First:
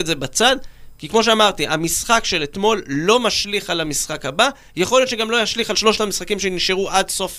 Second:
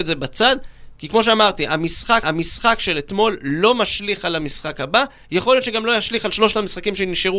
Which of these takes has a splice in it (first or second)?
second